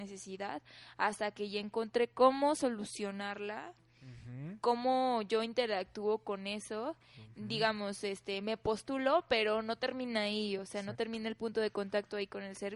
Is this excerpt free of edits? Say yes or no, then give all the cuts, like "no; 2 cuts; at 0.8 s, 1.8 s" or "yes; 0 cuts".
yes; 0 cuts